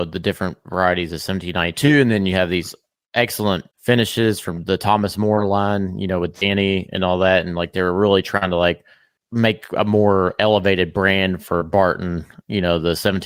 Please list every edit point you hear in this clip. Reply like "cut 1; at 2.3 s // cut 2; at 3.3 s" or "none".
cut 1; at 3.7 s